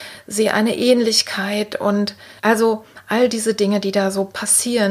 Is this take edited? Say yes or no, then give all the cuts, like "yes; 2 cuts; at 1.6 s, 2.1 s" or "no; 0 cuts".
yes; 1 cut; at 2.4 s